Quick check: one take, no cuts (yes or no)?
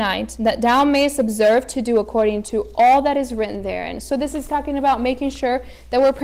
yes